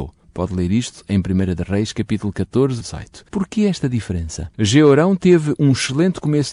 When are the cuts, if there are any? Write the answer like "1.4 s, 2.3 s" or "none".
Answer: 2.8 s, 3.3 s, 4.5 s